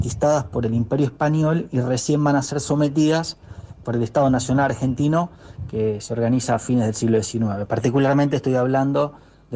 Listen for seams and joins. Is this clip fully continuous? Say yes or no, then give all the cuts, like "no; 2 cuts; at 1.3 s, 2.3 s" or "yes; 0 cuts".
yes; 0 cuts